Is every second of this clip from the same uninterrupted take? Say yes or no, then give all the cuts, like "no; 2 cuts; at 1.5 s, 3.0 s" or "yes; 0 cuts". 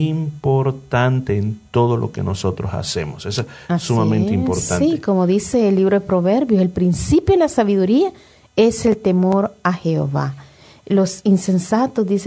yes; 0 cuts